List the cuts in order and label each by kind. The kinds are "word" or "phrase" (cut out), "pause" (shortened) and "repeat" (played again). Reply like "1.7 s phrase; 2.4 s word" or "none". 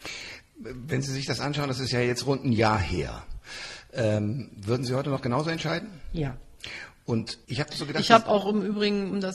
7.4 s pause

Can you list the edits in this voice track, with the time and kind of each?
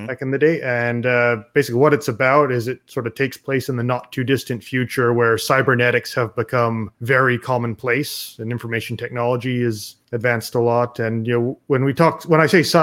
6.9 s pause; 10.0 s pause

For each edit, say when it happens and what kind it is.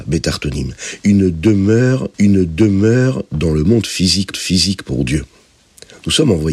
2.1 s repeat; 4.3 s repeat

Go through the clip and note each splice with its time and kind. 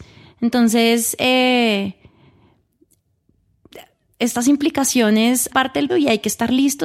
5.5 s word; 5.9 s word

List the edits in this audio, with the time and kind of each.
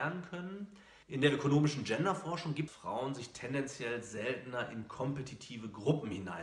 1.0 s pause; 2.7 s phrase

